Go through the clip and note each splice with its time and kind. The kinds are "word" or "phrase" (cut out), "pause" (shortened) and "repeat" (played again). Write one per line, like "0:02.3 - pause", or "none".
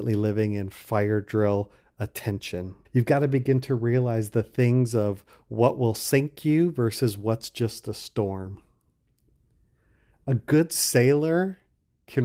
0:02.8 - pause